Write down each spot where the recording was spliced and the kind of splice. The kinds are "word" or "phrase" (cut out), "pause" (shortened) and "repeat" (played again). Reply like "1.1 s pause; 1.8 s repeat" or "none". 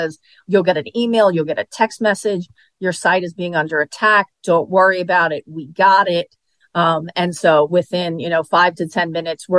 none